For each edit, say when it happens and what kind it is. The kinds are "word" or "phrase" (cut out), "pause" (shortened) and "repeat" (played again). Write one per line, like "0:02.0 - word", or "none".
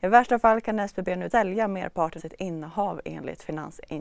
0:01.3 - word
0:02.2 - word